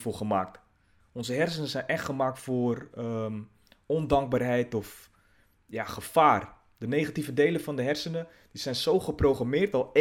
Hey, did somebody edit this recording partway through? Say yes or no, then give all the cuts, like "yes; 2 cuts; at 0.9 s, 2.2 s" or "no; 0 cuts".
no; 0 cuts